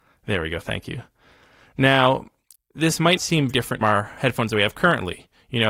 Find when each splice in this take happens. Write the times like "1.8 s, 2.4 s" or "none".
2.5 s, 3.2 s, 3.5 s, 3.8 s